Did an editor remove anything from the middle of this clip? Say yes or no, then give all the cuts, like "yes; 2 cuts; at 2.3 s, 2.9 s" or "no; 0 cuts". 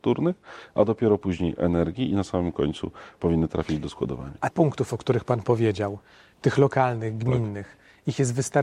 yes; 1 cut; at 4.5 s